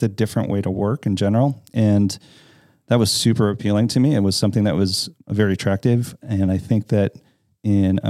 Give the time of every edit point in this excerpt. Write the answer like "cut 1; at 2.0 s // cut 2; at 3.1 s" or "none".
none